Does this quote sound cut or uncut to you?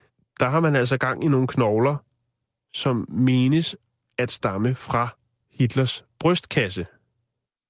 uncut